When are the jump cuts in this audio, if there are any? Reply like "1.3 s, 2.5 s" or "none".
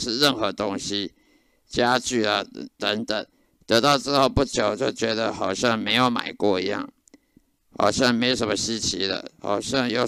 none